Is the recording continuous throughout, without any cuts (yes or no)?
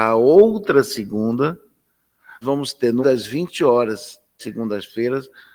no